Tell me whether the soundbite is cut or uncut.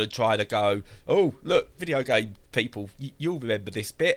cut